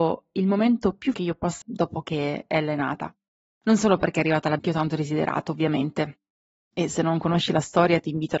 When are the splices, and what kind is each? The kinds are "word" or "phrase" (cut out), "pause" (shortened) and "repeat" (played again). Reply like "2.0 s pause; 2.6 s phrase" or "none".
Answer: 1.1 s word; 1.6 s word; 4.6 s word